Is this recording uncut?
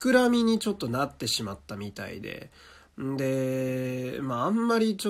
yes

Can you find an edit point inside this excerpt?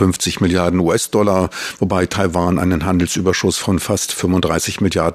no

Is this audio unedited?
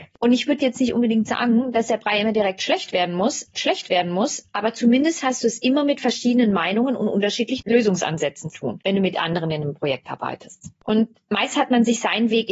no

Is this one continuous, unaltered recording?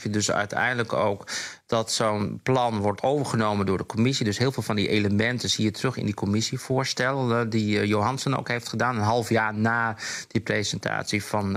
no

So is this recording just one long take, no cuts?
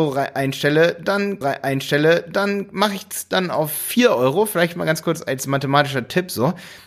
no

